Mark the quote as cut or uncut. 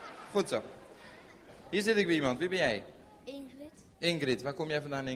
cut